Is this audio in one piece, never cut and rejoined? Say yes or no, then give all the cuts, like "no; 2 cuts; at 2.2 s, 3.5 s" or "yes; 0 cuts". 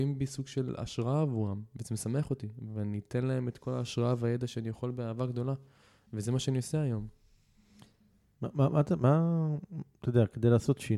yes; 0 cuts